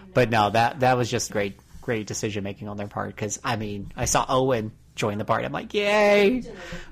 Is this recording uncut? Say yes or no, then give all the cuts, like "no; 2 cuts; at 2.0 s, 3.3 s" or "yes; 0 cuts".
no; 1 cut; at 1.3 s